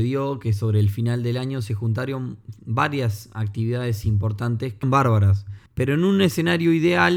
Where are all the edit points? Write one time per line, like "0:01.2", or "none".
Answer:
0:04.8
0:05.7